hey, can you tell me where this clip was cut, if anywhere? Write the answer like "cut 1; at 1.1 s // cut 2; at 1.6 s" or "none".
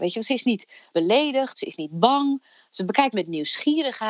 cut 1; at 3.1 s